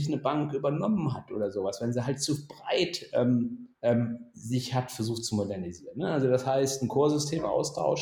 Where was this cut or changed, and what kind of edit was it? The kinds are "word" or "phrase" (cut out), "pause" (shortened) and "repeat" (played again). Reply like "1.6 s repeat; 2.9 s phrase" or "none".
3.7 s pause

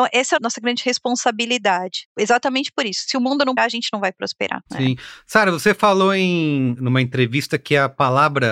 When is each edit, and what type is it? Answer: 3.6 s word

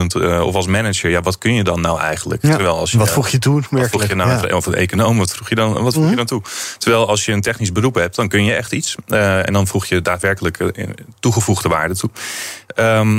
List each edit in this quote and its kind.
none

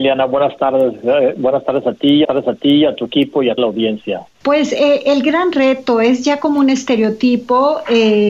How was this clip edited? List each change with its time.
2.2 s repeat; 3.6 s word; 4.3 s pause

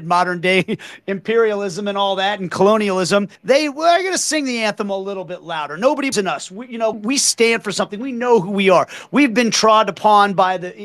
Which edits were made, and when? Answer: 3.4 s pause; 6.1 s word; 6.9 s word

